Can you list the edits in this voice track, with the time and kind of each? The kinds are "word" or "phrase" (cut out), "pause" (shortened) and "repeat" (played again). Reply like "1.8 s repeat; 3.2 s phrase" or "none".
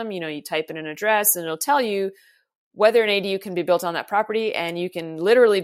none

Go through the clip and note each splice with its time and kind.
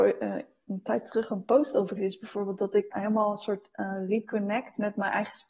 2.0 s word; 2.9 s word

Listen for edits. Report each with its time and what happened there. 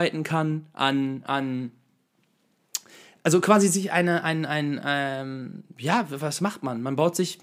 none

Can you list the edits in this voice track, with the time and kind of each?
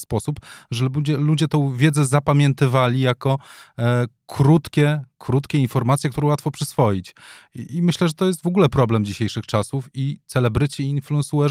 none

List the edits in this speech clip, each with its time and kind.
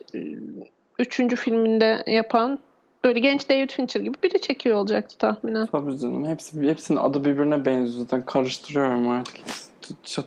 none

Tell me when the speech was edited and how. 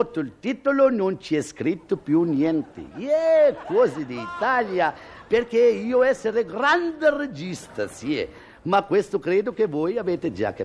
none

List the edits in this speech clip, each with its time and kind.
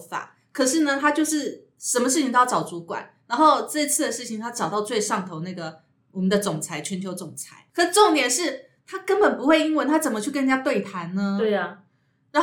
7.7 s pause

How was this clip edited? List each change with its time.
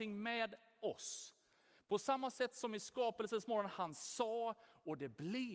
none

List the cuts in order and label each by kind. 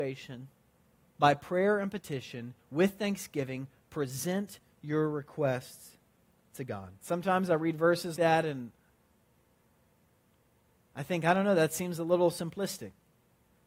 2.6 s pause; 7.0 s pause; 8.2 s word

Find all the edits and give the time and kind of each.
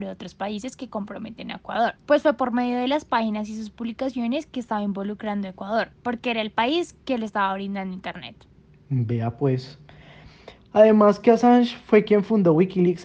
2.0 s pause; 5.9 s pause; 8.6 s pause; 10.6 s pause

